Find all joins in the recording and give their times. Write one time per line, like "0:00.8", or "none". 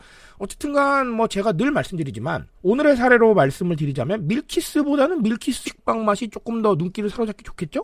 0:02.5
0:05.6